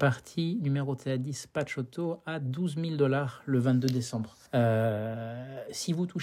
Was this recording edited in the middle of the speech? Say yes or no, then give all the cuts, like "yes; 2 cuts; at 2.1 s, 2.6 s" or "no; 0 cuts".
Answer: yes; 1 cut; at 4.4 s